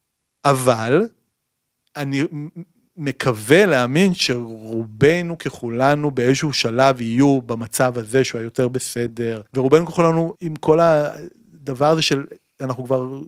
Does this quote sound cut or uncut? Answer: cut